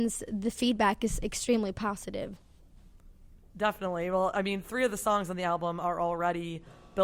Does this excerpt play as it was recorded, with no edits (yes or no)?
yes